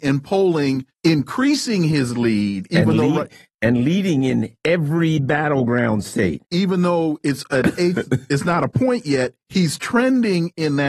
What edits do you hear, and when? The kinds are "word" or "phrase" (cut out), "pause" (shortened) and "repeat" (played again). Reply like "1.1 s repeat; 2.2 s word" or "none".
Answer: 0.9 s pause